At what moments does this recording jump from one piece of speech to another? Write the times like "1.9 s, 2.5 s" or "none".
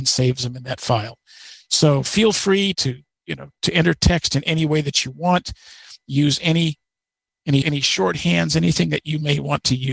2.7 s, 3.6 s, 7.6 s